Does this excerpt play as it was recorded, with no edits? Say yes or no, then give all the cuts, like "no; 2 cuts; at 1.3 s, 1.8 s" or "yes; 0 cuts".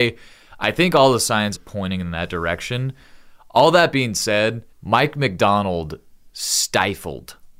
no; 2 cuts; at 1.5 s, 4.7 s